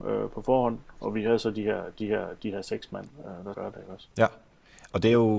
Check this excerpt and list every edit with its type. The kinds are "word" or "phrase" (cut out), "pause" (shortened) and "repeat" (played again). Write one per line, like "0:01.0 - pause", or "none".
0:02.0 - repeat
0:03.5 - word
0:04.1 - pause